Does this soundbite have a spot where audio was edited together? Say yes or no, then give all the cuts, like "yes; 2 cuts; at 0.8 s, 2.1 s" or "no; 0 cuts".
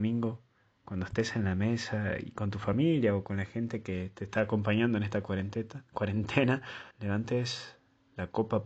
yes; 1 cut; at 6.9 s